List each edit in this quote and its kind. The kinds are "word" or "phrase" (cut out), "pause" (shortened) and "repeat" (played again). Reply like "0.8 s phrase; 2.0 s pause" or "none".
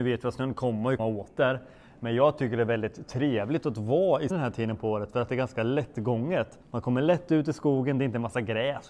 1.0 s word; 4.3 s word; 6.6 s pause